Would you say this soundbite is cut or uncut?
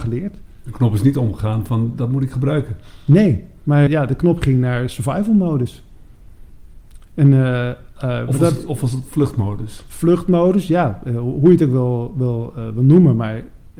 cut